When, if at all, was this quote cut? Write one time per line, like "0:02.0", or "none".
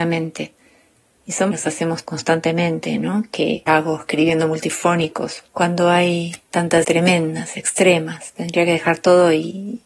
0:01.5
0:02.0
0:03.7
0:05.5
0:06.8